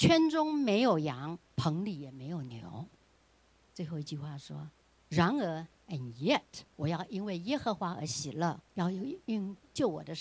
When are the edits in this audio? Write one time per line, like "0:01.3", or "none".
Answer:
0:01.5
0:03.2
0:06.7
0:08.7